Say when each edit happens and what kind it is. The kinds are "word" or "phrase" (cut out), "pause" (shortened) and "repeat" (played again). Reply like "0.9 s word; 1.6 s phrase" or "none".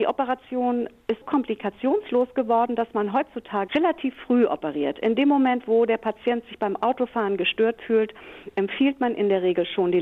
1.2 s word; 3.7 s word